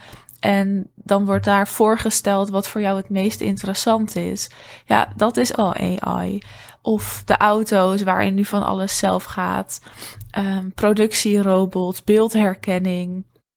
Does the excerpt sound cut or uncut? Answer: cut